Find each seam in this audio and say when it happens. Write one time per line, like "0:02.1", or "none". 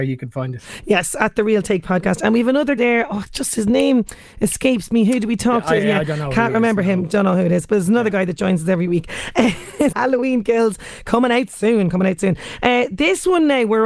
0:02.8
0:09.9